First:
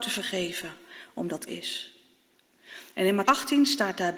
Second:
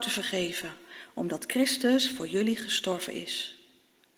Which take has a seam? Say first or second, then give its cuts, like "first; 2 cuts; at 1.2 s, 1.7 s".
first; 2 cuts; at 1.5 s, 3.2 s